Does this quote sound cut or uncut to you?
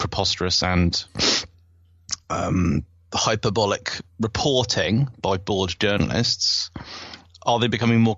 uncut